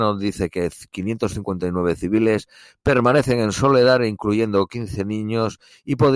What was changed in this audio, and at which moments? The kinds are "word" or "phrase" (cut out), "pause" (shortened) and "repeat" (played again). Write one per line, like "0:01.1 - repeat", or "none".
none